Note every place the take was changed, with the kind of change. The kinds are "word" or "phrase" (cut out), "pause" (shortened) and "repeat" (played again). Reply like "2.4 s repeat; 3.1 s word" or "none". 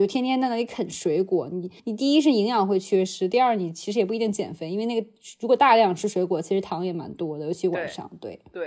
1.8 s pause